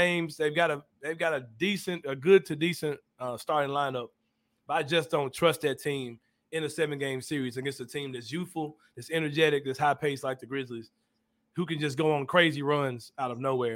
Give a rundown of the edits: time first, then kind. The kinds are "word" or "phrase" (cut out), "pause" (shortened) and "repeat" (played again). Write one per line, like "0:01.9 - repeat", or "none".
none